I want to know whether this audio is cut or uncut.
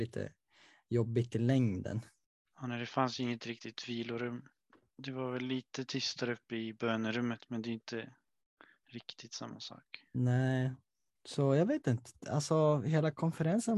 uncut